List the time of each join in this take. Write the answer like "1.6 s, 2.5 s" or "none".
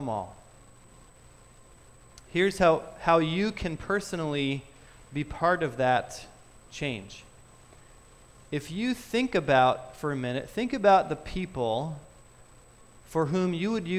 6.7 s